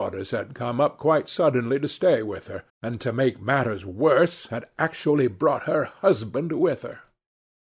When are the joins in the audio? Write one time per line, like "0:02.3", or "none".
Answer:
0:02.7